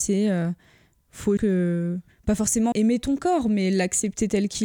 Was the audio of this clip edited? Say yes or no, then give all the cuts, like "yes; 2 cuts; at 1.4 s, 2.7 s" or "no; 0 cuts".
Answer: yes; 2 cuts; at 1.4 s, 2.7 s